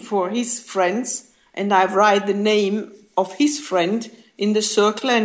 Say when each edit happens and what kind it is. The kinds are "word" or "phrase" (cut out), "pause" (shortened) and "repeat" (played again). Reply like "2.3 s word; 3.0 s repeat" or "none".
none